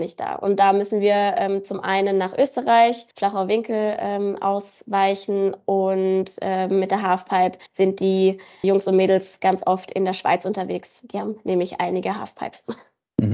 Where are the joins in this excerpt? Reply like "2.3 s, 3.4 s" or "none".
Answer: 3.1 s, 7.7 s, 8.6 s